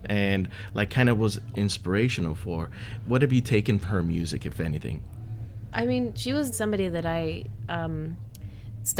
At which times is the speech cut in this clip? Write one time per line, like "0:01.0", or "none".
0:01.5
0:03.8
0:06.5